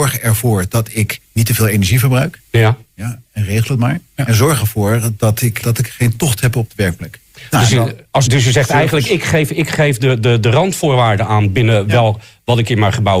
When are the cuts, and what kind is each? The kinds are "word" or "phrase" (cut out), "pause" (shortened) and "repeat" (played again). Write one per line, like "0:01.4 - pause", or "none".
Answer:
0:01.2 - pause
0:04.1 - pause
0:05.6 - word
0:08.3 - word